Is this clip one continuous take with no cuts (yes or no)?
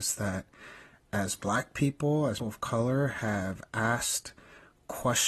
no